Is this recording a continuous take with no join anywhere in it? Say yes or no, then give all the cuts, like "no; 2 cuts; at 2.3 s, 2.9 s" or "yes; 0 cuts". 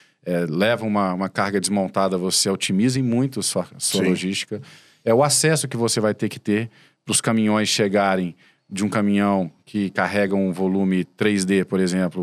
yes; 0 cuts